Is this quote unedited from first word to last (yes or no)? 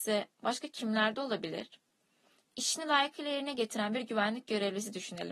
yes